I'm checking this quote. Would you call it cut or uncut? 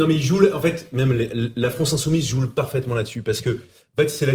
uncut